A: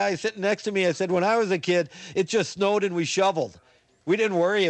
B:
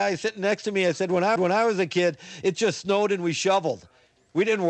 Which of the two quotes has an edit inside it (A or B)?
B